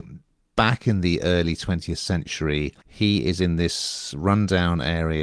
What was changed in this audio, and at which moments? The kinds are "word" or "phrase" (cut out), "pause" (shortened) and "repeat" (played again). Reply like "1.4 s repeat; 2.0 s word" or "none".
2.8 s pause